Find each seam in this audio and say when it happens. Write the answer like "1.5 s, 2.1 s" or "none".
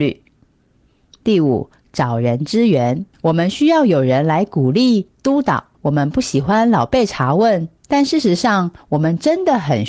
3.1 s, 5.7 s, 7.8 s